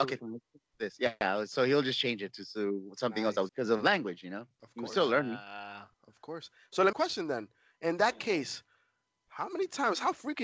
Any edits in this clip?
yes; 3 cuts; at 3.5 s, 5.9 s, 6.9 s

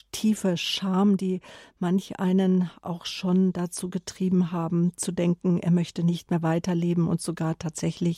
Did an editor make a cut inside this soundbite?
no; 0 cuts

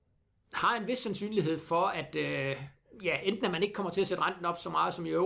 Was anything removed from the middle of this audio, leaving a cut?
no; 0 cuts

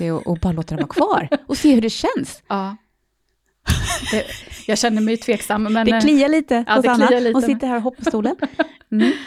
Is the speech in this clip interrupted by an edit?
yes; 1 cut; at 8.0 s

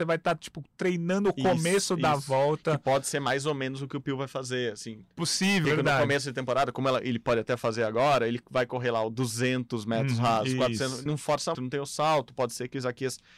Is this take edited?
yes; 3 cuts; at 5.6 s, 11.1 s, 11.5 s

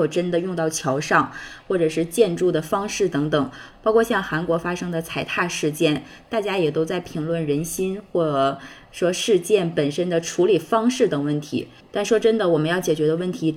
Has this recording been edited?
no; 0 cuts

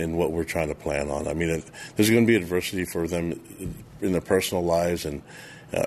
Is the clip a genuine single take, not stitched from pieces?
yes; 0 cuts

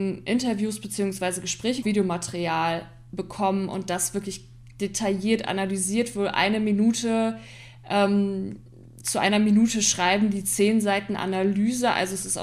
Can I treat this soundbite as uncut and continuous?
no; 1 cut; at 1.8 s

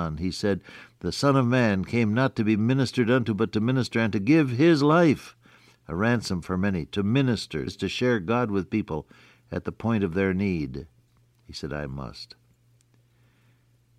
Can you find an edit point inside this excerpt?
yes; 1 cut; at 7.7 s

